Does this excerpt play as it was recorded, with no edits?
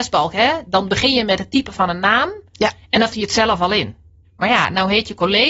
no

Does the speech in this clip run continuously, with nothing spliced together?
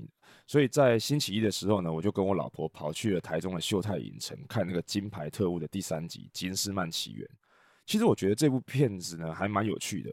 yes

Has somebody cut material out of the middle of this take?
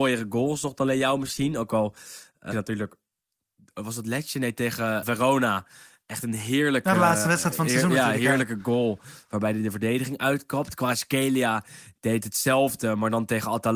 yes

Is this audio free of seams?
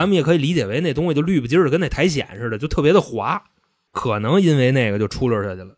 yes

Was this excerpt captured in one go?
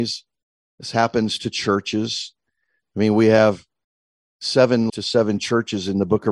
no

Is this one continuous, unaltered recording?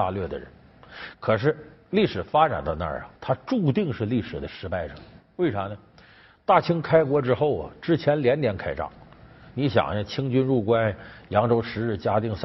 no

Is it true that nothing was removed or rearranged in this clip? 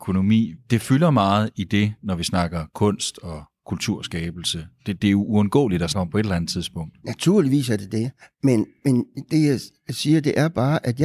no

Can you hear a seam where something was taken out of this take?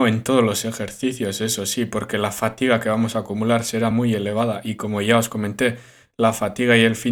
no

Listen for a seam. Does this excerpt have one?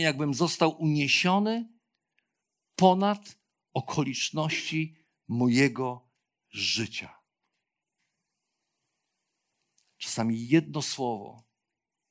no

